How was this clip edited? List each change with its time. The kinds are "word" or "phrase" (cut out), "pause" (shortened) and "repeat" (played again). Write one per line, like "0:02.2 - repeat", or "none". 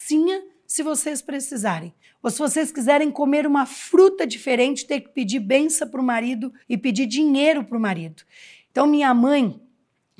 0:02.0 - pause
0:06.6 - pause